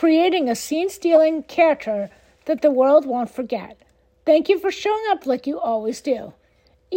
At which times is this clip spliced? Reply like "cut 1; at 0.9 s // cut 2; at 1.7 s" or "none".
none